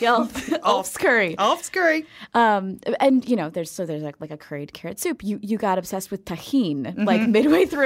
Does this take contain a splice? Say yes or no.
no